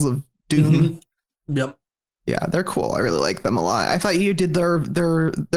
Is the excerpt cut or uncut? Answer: uncut